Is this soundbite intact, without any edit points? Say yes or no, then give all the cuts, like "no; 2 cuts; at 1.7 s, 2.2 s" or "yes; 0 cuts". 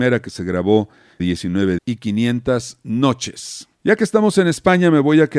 no; 3 cuts; at 1.2 s, 1.8 s, 3.7 s